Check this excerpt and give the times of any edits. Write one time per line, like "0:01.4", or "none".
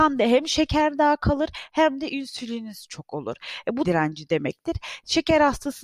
0:03.8